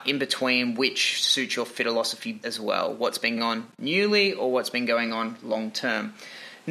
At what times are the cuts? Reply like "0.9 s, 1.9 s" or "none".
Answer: 2.4 s, 3.4 s